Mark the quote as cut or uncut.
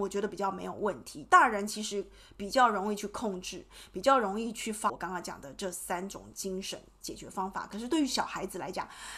cut